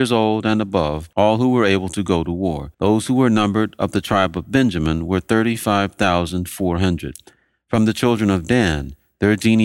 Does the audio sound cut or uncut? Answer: cut